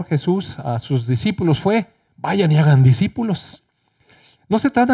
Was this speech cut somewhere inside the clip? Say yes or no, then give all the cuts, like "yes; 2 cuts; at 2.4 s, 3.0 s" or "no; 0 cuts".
no; 0 cuts